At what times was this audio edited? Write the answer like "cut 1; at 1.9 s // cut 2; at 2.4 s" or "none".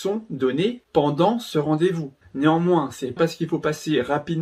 cut 1; at 3.2 s